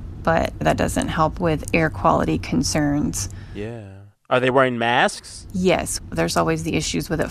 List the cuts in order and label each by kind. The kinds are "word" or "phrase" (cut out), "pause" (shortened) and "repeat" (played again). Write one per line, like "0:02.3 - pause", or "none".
none